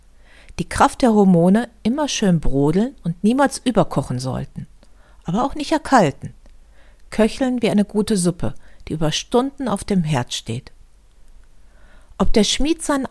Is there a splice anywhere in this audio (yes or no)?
no